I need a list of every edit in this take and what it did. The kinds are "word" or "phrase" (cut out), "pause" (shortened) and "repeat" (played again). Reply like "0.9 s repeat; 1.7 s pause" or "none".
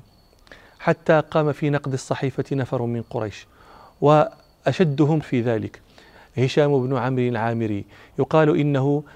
5.2 s word